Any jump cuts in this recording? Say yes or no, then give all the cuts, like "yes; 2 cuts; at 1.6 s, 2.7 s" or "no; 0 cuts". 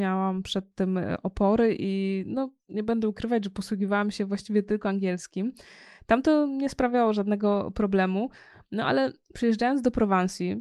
no; 0 cuts